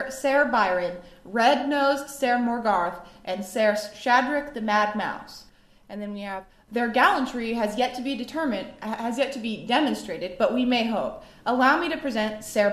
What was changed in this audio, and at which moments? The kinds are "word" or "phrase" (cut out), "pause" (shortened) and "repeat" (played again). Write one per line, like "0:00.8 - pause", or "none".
none